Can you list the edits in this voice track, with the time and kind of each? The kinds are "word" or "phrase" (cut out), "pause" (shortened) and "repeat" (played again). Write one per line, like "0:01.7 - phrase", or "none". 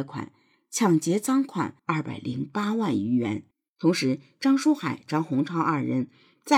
0:01.8 - pause
0:03.5 - pause